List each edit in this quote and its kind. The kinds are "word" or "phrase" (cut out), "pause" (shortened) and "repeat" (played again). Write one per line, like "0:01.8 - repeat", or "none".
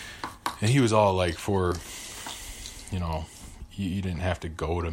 none